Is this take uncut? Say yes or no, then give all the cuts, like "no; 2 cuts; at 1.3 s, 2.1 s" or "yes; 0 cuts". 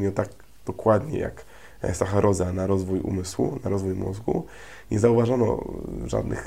yes; 0 cuts